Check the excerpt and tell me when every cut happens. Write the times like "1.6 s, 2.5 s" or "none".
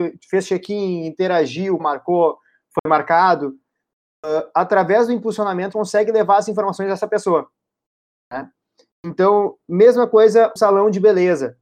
1.8 s, 5.7 s, 10.6 s